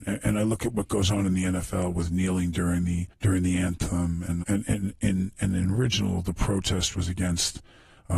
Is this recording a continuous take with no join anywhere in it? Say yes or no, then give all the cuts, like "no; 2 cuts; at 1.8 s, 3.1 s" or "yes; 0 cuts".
no; 2 cuts; at 3.1 s, 4.4 s